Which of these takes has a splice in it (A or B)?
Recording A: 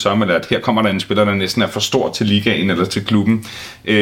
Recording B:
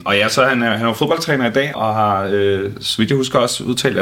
B